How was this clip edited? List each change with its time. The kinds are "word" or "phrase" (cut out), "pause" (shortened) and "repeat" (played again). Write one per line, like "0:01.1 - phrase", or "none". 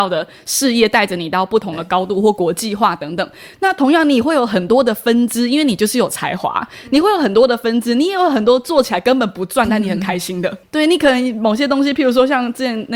0:10.6 - word